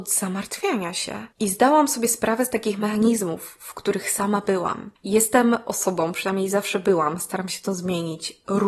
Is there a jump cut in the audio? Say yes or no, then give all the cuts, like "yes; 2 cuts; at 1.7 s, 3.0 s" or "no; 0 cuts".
no; 0 cuts